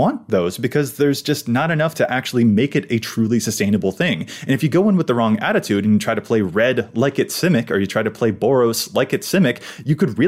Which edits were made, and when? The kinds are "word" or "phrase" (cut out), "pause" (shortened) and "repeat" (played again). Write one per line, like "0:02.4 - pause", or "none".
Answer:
none